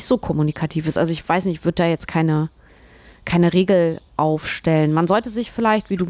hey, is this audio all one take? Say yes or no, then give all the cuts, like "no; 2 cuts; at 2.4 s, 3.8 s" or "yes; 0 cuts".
yes; 0 cuts